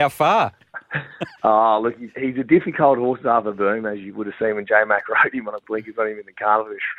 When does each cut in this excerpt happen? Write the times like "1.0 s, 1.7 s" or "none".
1.4 s, 5.6 s